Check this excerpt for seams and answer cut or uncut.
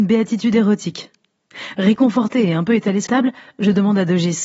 cut